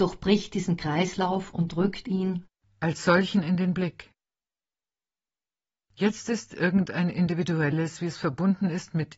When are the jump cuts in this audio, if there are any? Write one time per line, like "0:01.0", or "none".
none